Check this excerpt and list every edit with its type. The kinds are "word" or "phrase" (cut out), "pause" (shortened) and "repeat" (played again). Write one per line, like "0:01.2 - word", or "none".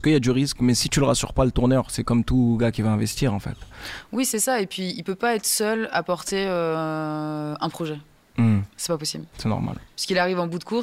none